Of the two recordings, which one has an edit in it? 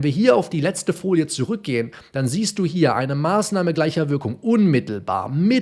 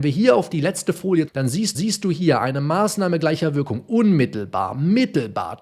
second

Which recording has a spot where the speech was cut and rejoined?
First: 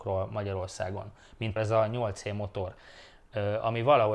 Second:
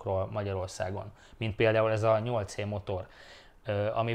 first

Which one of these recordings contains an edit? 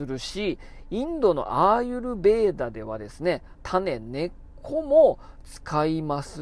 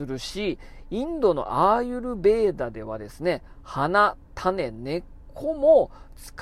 first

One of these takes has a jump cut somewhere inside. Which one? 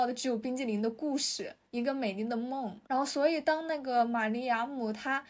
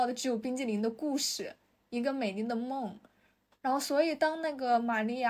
first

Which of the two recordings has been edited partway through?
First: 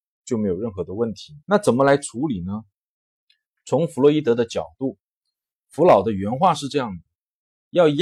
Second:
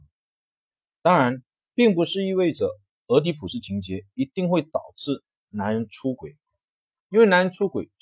first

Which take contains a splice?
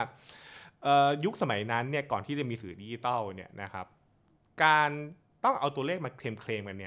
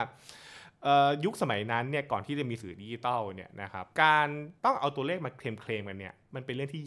second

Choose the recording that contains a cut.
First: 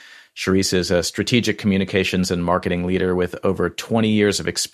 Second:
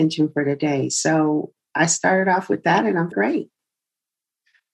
second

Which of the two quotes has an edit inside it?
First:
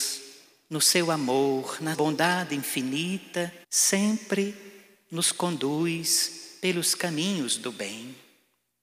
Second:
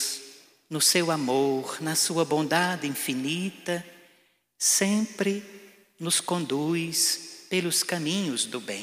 first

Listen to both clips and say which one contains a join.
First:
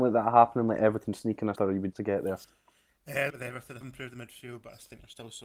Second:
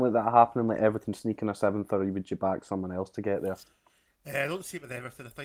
first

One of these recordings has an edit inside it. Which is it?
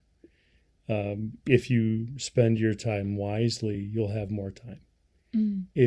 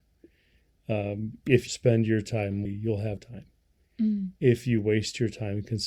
second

